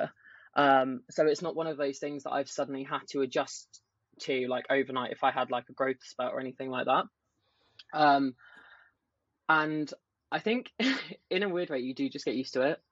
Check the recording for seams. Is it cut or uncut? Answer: uncut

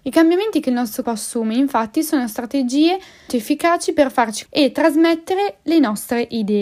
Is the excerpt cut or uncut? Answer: cut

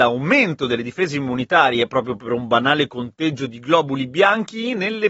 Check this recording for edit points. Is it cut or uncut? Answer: uncut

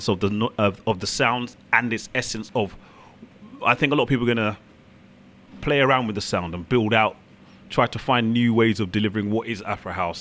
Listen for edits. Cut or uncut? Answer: uncut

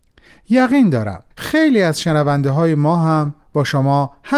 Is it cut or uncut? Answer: cut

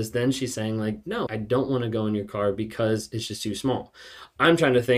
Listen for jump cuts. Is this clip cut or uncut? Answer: cut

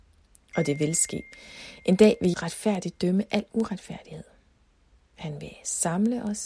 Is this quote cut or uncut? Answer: cut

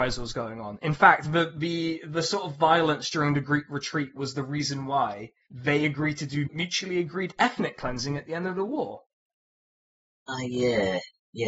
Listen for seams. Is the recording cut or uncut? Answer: uncut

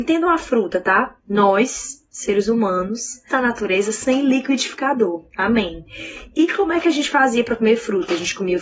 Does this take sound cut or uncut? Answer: cut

